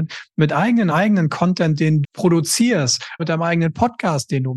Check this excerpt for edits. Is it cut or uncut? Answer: cut